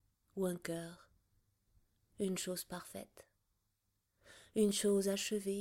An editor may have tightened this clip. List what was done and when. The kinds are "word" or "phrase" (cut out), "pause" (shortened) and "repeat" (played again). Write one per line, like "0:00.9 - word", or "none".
none